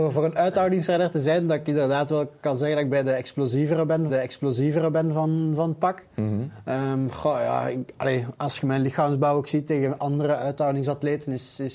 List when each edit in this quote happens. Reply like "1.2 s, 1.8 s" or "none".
4.1 s, 10.0 s